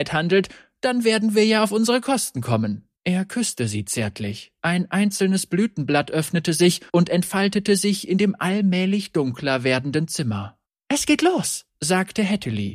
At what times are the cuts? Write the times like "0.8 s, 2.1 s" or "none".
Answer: 3.0 s, 4.6 s, 6.9 s, 10.7 s, 11.7 s